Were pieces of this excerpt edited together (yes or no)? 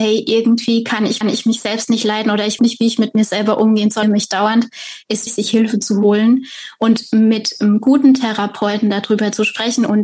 yes